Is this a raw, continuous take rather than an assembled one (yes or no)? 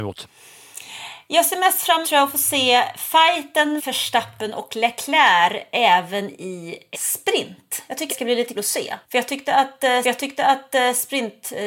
no